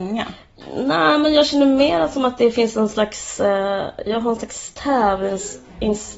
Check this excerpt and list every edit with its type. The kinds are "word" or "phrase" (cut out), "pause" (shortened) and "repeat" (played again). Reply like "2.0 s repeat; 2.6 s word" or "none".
none